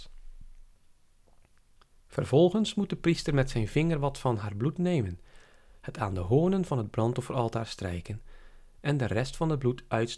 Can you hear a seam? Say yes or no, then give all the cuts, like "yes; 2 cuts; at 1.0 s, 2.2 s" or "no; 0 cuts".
no; 0 cuts